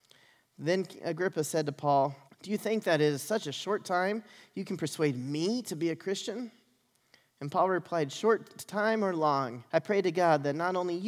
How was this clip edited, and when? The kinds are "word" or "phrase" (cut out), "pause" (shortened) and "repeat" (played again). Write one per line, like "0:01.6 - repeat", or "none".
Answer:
0:02.3 - pause
0:09.7 - pause